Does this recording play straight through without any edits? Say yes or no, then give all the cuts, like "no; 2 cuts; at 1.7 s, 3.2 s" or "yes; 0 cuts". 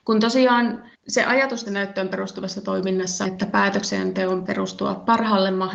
no; 4 cuts; at 0.9 s, 1.7 s, 3.2 s, 4.5 s